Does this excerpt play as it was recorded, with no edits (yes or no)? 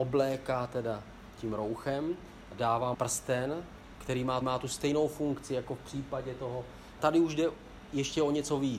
no